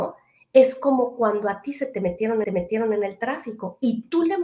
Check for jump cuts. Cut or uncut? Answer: cut